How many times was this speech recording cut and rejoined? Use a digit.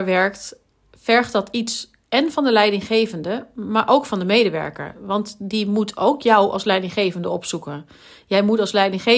0